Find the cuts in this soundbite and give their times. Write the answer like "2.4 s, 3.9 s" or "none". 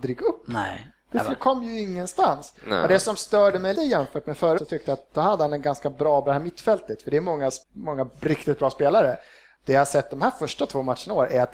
3.7 s, 4.6 s, 6.3 s, 7.6 s